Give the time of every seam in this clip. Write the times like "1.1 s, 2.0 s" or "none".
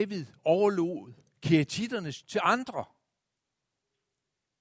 2.2 s